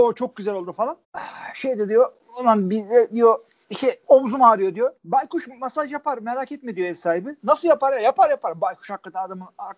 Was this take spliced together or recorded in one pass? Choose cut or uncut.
cut